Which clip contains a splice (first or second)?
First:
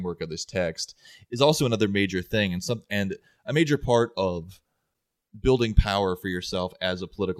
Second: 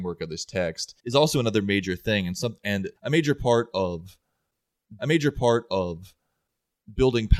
second